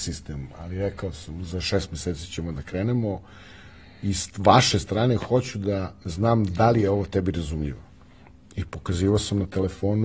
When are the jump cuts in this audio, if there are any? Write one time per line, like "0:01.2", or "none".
none